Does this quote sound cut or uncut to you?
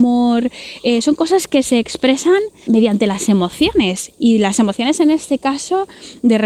cut